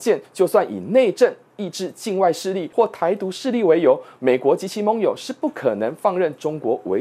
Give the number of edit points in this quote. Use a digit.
0